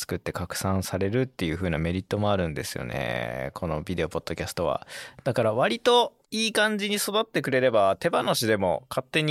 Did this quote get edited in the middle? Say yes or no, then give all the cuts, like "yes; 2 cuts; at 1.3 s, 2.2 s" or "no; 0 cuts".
yes; 1 cut; at 6.2 s